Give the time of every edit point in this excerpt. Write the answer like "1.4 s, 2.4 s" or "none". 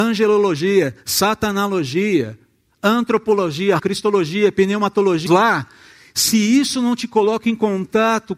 3.8 s, 5.3 s